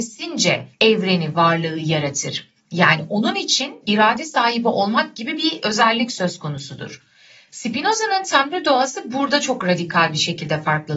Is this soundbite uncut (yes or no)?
yes